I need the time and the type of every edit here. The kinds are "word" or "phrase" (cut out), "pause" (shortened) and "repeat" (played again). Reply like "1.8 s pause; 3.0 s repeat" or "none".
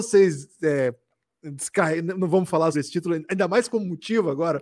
2.7 s word